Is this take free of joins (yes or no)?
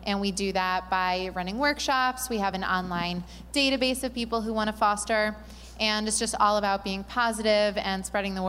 yes